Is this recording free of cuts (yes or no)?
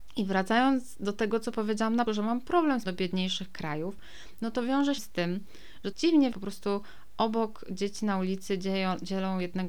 no